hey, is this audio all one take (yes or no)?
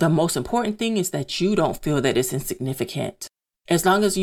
yes